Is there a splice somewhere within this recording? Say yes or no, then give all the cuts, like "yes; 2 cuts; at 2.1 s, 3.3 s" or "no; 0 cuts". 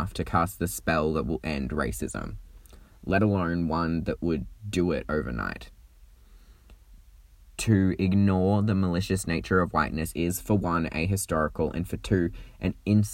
no; 0 cuts